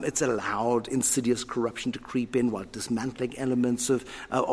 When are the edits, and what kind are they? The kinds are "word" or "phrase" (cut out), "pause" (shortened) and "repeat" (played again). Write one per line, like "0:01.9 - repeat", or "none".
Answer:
none